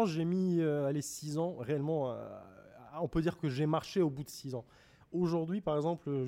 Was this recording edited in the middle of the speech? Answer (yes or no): no